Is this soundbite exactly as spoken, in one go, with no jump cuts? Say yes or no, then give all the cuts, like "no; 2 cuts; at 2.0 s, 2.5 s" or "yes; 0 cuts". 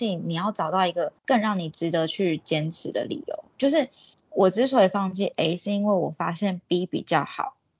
no; 2 cuts; at 1.2 s, 4.1 s